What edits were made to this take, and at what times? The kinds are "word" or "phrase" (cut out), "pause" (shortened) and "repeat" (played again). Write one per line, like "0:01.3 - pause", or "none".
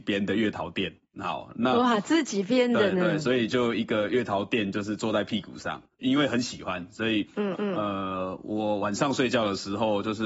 0:07.5 - repeat